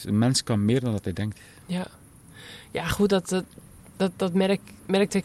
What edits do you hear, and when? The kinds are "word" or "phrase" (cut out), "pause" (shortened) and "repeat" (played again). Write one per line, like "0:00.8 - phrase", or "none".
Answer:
none